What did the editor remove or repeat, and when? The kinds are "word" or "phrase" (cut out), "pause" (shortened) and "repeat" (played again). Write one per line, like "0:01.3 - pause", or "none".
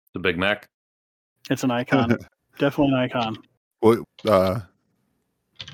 0:02.3 - pause
0:04.0 - word